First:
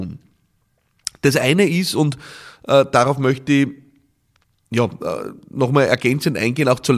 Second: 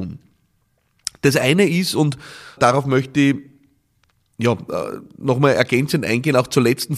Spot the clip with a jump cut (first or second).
second